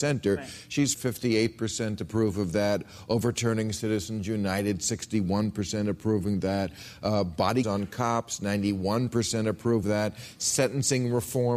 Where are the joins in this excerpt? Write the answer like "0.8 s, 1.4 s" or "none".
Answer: 0.9 s, 7.6 s, 9.8 s